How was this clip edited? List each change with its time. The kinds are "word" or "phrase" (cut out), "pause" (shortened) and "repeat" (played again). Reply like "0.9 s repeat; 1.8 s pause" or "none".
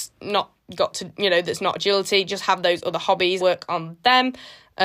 3.4 s word